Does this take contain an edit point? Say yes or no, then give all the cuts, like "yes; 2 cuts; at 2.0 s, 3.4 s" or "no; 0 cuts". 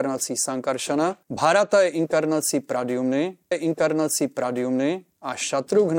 yes; 2 cuts; at 1.2 s, 3.5 s